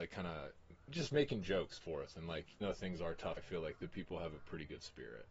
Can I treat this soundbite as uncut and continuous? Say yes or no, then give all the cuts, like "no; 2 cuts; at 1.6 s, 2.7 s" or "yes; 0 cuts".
no; 3 cuts; at 1.8 s, 2.6 s, 3.4 s